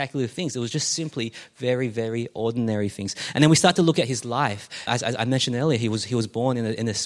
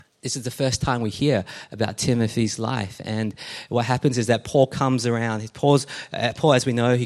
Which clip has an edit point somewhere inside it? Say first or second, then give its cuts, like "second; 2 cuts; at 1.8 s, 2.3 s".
first; 1 cut; at 4.9 s